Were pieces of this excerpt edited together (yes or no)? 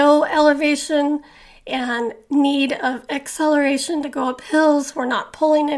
no